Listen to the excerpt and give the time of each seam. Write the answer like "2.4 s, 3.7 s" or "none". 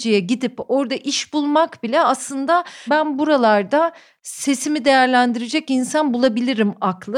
2.9 s